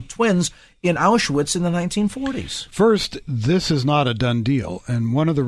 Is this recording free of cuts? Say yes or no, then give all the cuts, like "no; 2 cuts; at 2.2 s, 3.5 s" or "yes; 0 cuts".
yes; 0 cuts